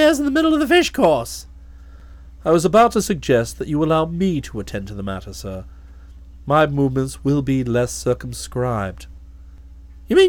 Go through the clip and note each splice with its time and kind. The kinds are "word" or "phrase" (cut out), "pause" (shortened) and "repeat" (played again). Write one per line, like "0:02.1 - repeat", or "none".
none

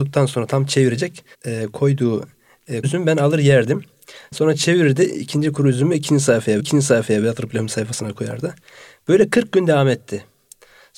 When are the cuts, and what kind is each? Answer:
0:01.3 - pause
0:02.8 - word
0:06.6 - repeat

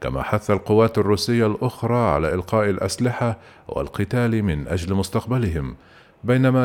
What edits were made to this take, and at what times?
none

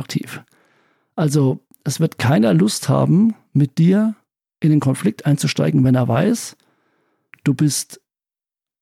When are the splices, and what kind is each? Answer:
none

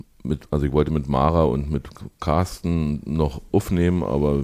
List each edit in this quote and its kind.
none

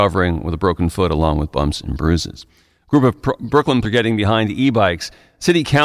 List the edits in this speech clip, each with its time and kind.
0:03.8 - word

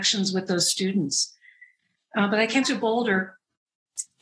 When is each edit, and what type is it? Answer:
0:02.6 - word

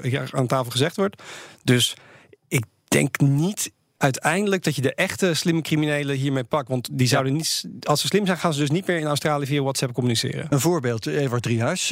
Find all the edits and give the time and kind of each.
none

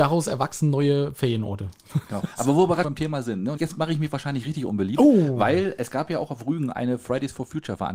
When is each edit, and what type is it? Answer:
0:02.8 - phrase
0:03.6 - word

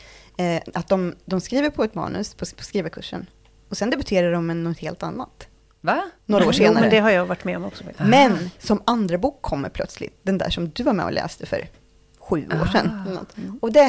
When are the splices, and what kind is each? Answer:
none

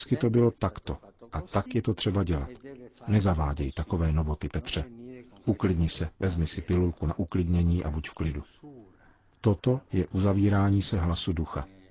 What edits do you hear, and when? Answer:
none

